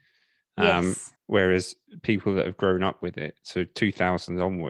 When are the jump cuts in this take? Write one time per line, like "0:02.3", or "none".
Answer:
0:01.2